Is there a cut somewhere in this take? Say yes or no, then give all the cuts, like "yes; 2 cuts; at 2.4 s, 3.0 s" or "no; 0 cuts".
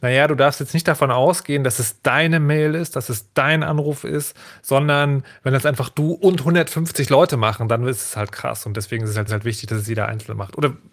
yes; 1 cut; at 9.3 s